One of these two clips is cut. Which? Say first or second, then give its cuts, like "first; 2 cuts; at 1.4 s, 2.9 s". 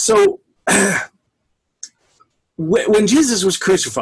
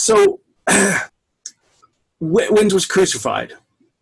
second; 2 cuts; at 1.1 s, 2.7 s